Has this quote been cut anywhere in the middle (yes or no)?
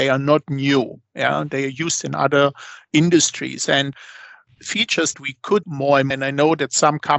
yes